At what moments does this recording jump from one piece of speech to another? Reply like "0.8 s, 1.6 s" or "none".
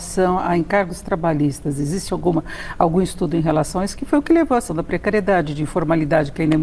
4.7 s